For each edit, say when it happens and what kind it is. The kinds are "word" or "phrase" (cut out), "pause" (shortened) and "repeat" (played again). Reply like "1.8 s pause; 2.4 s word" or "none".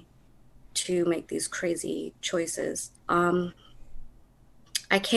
3.0 s pause